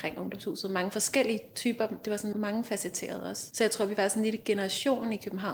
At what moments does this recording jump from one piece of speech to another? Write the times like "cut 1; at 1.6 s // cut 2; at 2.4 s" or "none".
cut 1; at 2.3 s